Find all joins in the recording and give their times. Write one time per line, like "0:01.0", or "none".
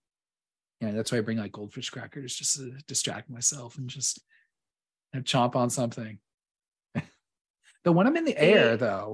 none